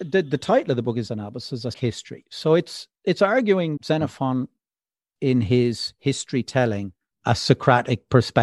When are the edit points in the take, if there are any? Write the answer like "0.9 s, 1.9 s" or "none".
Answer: 1.1 s, 1.7 s, 2.9 s, 3.8 s, 5.2 s, 7.1 s